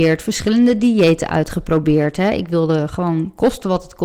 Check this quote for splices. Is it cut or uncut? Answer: uncut